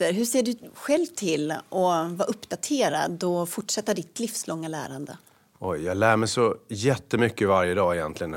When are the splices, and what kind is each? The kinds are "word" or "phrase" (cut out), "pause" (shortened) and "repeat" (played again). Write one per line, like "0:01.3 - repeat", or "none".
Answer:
none